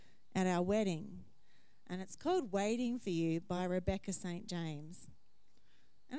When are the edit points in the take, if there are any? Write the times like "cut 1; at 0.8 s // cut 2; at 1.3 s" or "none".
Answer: none

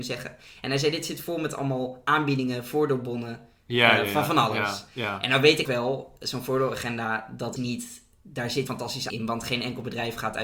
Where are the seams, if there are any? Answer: cut 1; at 5.6 s // cut 2; at 7.6 s // cut 3; at 8.7 s // cut 4; at 9.1 s

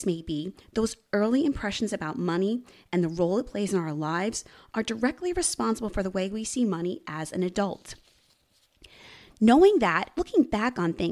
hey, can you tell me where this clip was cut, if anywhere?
cut 1; at 10.2 s

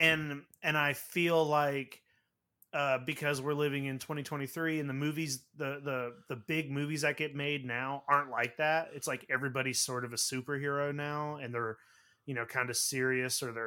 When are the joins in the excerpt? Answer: none

